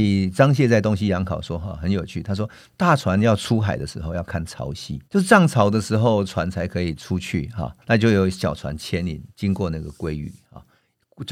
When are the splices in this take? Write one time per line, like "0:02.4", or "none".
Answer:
0:05.0
0:07.8